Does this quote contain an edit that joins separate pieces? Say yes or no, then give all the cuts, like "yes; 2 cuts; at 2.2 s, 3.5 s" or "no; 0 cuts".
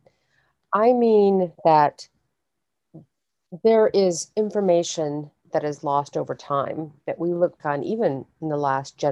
yes; 3 cuts; at 1.5 s, 7.0 s, 7.6 s